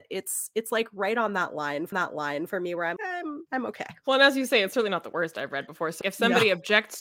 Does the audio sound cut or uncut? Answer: cut